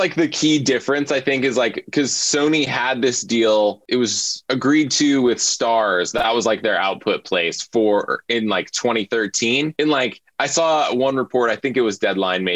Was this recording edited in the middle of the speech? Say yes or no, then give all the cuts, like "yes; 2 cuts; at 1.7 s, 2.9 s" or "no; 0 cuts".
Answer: no; 0 cuts